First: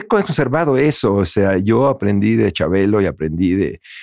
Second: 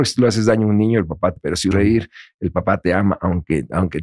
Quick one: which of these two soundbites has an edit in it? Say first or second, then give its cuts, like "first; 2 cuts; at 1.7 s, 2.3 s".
second; 2 cuts; at 1.4 s, 1.7 s